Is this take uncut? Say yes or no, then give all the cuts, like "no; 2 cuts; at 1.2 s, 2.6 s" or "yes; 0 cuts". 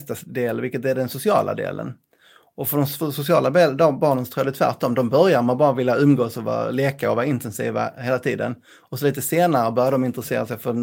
yes; 0 cuts